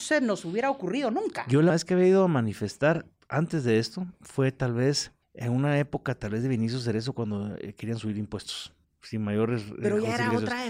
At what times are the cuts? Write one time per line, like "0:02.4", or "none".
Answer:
0:01.7
0:03.1
0:04.1
0:05.2
0:08.8